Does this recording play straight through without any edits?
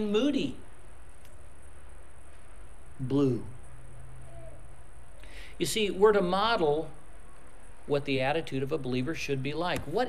yes; 0 cuts

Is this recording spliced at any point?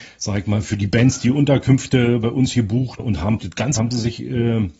yes; 3 cuts; at 3.0 s, 3.4 s, 3.8 s

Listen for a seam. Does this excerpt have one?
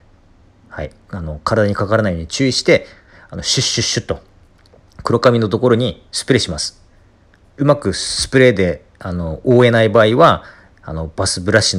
no; 0 cuts

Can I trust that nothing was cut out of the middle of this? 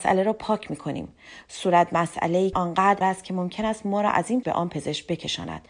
no; 3 cuts; at 2.5 s, 3.0 s, 4.4 s

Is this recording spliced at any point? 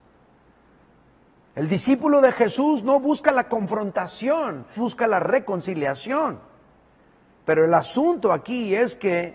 yes; 1 cut; at 4.8 s

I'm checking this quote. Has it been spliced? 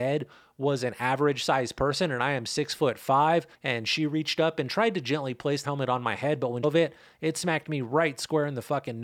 yes; 3 cuts; at 3.5 s, 5.6 s, 6.6 s

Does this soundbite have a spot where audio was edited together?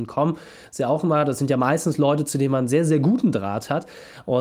no; 0 cuts

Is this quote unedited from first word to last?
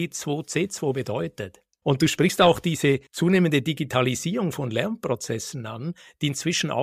no; 1 cut; at 3.1 s

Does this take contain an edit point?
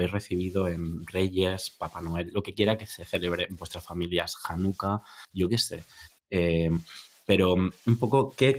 yes; 1 cut; at 5.3 s

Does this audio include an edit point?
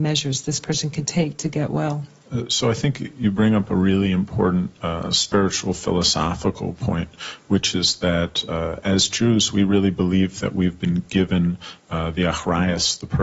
no; 0 cuts

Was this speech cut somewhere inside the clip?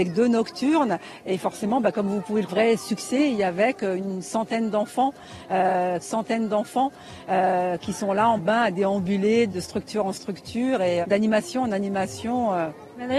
yes; 4 cuts; at 2.5 s, 6.0 s, 8.4 s, 11.0 s

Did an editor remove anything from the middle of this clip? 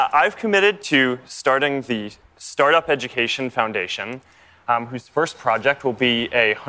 no; 0 cuts

